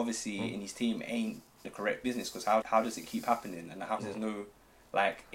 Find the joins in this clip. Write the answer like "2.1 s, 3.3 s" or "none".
1.6 s, 2.6 s, 4.0 s